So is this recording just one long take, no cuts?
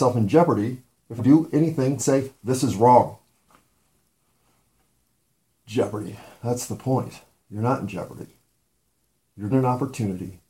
no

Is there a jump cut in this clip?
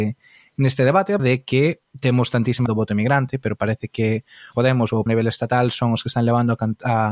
yes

